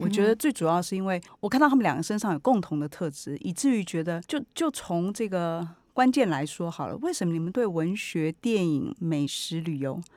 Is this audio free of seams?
no; 2 cuts; at 1.3 s, 4.3 s

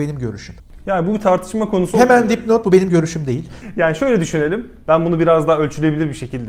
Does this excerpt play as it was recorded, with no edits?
yes; 0 cuts

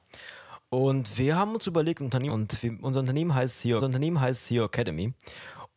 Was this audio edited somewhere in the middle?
yes; 2 cuts; at 2.3 s, 3.8 s

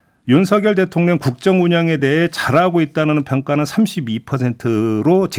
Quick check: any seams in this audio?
no; 0 cuts

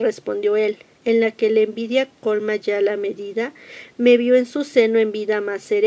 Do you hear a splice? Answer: yes; 1 cut; at 0.9 s

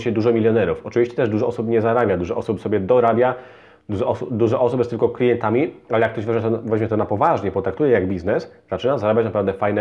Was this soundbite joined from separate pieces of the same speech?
no; 0 cuts

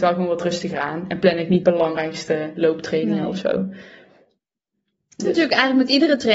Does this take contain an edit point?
yes; 2 cuts; at 1.6 s, 5.2 s

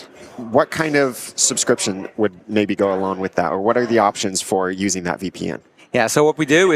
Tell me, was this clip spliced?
no; 0 cuts

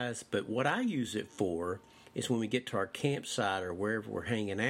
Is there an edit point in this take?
no; 0 cuts

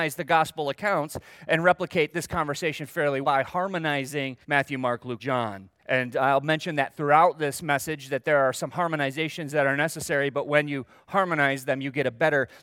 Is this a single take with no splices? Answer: no; 4 cuts; at 3.2 s, 4.4 s, 5.2 s, 5.8 s

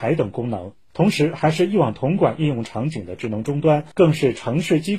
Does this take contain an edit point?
yes; 1 cut; at 3.9 s

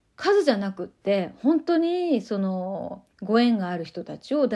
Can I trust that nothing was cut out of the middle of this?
no; 1 cut; at 3.1 s

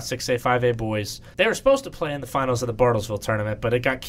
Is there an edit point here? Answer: yes; 1 cut; at 1.3 s

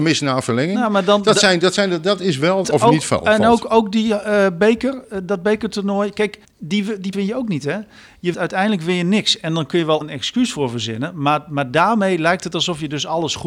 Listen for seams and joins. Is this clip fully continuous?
no; 5 cuts; at 2.6 s, 6.4 s, 7.1 s, 8.3 s, 10.0 s

